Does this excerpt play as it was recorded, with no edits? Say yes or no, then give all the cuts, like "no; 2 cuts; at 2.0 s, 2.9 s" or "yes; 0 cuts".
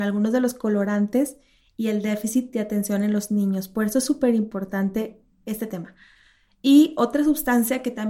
yes; 0 cuts